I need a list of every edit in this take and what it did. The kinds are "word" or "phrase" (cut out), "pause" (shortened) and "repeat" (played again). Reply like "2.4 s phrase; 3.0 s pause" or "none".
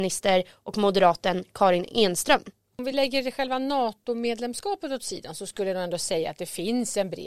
none